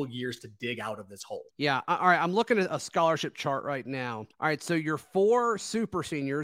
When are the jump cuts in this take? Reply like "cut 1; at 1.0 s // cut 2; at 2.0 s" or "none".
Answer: cut 1; at 1.5 s // cut 2; at 4.3 s